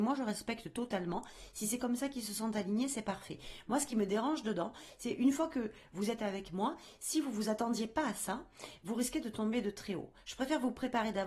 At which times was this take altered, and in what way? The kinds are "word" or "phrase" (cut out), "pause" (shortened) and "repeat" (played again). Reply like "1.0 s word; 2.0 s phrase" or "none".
none

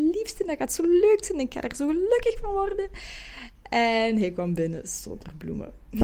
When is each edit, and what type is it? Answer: none

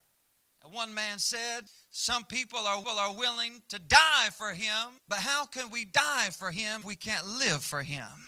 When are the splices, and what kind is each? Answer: 1.7 s pause; 2.8 s repeat; 5.0 s pause; 6.8 s word

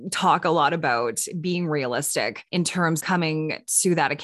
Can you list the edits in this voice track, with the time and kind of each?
2.5 s pause; 3.0 s word

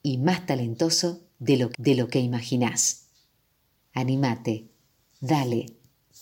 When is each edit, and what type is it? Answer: 1.7 s repeat

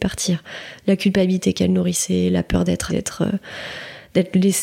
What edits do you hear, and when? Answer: 2.9 s word

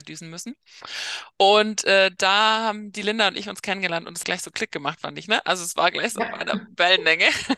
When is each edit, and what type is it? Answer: 4.2 s phrase

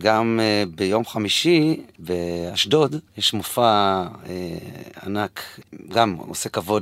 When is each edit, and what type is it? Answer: 3.1 s pause

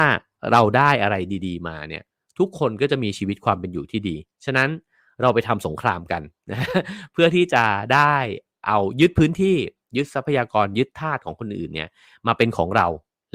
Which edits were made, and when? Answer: none

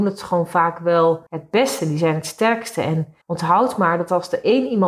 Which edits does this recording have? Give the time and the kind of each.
1.3 s pause; 3.2 s pause

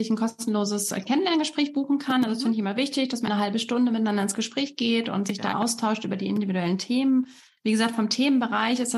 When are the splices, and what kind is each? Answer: 3.3 s word; 5.5 s word

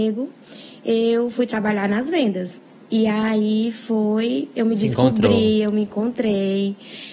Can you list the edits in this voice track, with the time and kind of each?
2.7 s pause

